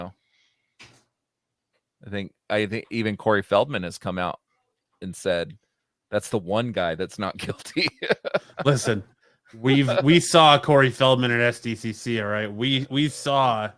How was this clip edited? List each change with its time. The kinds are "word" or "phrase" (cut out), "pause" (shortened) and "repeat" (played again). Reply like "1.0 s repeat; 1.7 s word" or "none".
none